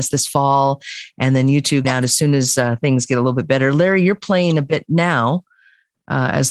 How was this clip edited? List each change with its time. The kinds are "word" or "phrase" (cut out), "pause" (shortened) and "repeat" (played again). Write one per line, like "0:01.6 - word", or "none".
0:01.8 - word